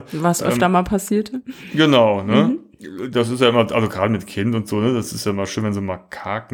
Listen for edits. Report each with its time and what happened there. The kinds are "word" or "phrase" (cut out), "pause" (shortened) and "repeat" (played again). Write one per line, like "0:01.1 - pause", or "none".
none